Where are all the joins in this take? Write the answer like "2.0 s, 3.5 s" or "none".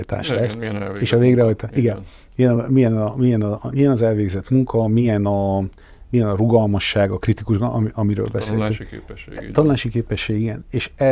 none